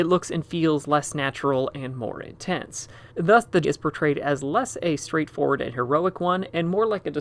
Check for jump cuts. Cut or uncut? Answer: cut